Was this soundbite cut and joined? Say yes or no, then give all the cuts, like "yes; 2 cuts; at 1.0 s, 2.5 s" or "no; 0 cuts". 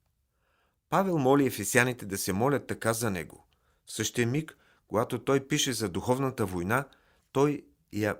no; 0 cuts